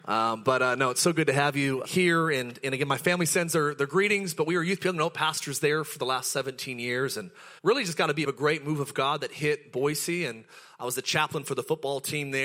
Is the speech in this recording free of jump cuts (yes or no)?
no